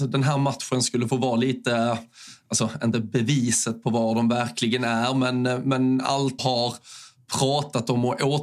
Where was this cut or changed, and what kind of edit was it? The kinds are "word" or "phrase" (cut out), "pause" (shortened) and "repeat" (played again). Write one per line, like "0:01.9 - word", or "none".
0:06.4 - phrase